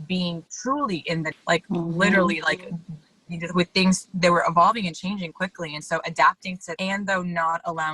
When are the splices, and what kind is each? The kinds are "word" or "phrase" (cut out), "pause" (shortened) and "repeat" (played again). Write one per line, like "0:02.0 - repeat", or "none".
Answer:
0:01.3 - word
0:05.3 - word
0:06.8 - word